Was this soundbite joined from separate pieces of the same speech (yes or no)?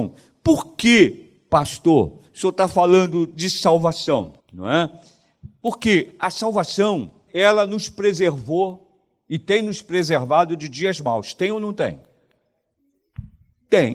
yes